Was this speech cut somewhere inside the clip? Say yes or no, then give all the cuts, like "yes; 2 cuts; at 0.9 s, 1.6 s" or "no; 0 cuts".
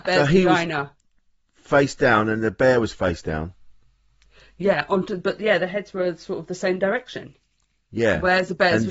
no; 0 cuts